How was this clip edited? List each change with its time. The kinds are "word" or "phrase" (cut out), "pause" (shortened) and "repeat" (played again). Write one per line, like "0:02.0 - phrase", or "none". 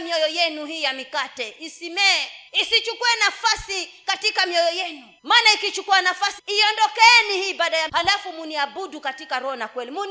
0:02.5 - pause
0:05.2 - pause
0:06.4 - word
0:07.9 - word